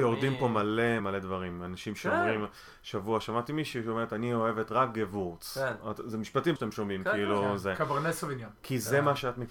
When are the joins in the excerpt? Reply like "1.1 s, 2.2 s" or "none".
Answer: 1.0 s, 6.6 s